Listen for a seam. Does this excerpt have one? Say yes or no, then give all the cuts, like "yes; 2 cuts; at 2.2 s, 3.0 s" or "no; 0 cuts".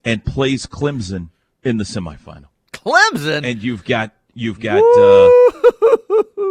no; 0 cuts